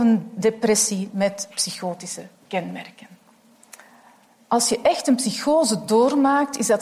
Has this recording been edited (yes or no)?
no